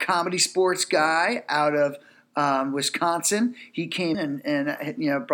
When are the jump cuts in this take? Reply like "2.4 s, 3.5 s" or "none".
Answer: 4.1 s